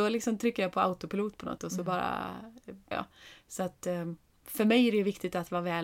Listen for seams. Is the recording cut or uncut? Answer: cut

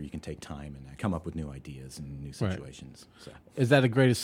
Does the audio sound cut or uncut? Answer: cut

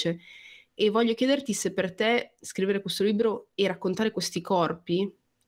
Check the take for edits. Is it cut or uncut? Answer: uncut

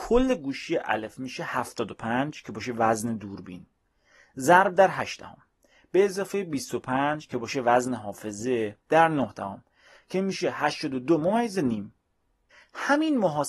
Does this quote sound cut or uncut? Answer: uncut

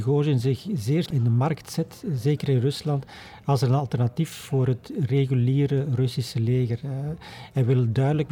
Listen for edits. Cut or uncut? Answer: cut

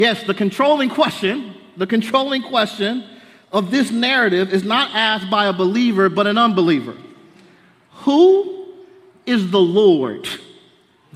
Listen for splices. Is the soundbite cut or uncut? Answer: uncut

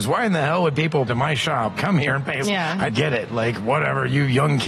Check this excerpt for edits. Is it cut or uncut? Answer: cut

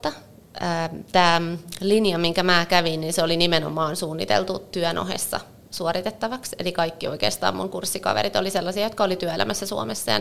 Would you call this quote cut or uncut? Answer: uncut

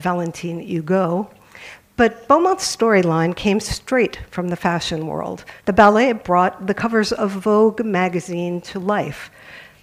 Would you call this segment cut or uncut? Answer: cut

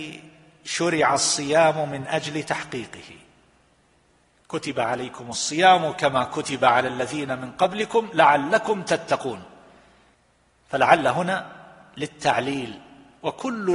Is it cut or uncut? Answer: uncut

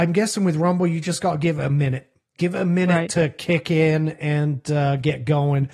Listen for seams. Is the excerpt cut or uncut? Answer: uncut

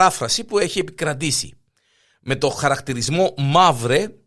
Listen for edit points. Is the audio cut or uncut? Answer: uncut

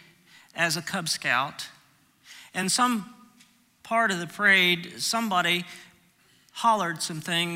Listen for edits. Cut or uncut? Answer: uncut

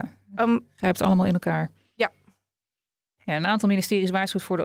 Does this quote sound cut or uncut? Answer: uncut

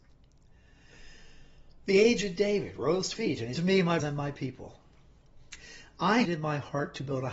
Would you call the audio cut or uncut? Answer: cut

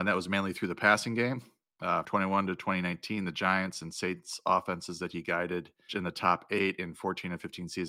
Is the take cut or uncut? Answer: cut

